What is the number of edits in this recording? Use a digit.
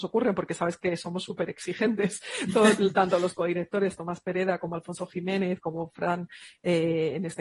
0